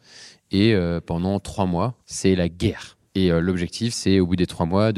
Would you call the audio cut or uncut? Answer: cut